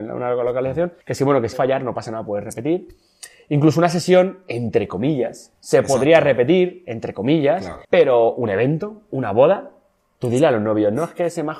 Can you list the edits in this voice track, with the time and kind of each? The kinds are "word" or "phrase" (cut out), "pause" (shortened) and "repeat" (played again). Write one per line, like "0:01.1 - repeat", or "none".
0:01.0 - pause
0:01.5 - phrase
0:07.8 - pause